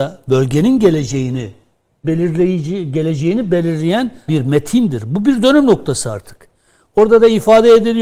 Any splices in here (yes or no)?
yes